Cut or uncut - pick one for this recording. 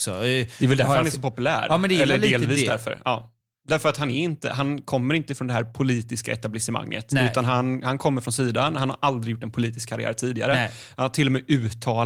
uncut